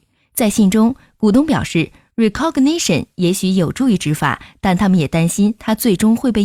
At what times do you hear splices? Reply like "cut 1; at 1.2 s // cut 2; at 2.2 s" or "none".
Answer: none